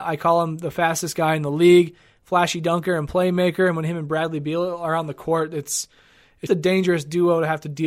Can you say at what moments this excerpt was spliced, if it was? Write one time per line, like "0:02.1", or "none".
0:06.5